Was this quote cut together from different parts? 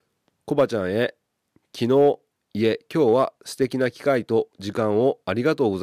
no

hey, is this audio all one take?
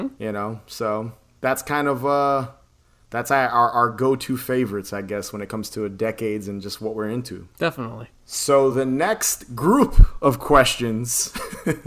yes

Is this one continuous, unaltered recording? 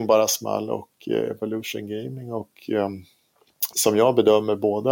no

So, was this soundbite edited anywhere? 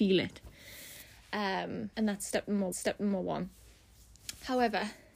yes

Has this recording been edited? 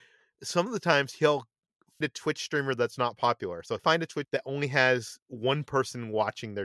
yes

